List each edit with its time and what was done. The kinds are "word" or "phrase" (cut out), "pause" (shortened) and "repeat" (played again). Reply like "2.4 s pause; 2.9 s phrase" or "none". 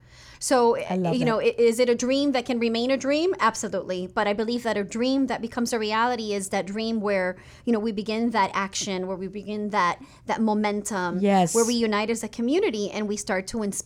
none